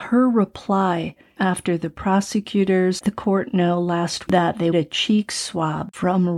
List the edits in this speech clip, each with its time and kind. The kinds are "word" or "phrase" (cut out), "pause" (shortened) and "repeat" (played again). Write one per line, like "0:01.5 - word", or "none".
0:01.4 - word
0:03.0 - word
0:04.3 - word
0:04.7 - word

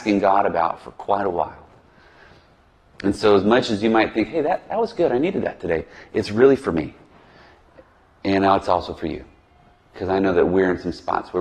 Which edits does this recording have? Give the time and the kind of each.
none

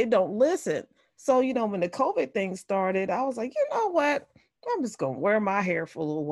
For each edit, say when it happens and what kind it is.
none

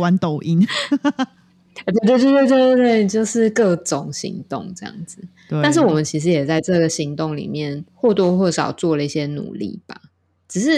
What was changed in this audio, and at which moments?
0:07.9 - pause

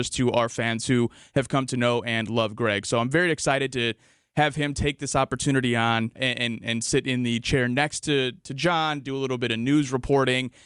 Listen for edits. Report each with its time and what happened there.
0:06.1 - word

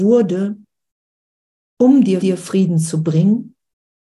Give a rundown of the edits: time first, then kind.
0:02.2 - repeat

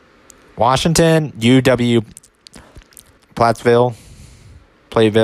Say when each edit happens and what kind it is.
0:03.2 - word

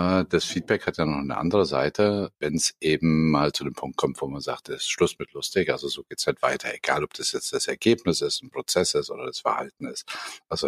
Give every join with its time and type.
0:02.3 - pause

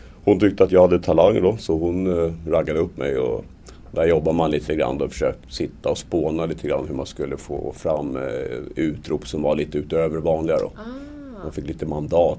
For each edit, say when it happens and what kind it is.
0:05.4 - word

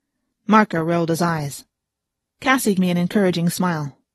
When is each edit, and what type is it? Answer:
0:02.8 - word

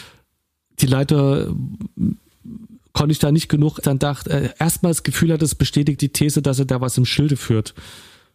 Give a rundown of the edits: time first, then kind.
0:03.8 - phrase
0:06.0 - word

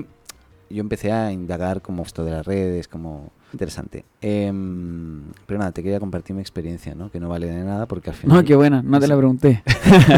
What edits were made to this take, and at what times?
0:02.1 - word
0:03.5 - word

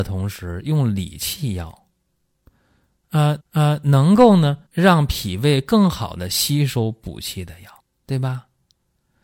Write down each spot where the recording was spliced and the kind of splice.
0:03.4 - repeat
0:04.7 - pause
0:07.8 - pause

